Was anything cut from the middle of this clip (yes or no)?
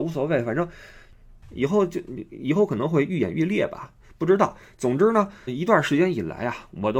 yes